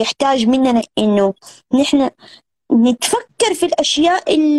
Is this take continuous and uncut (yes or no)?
yes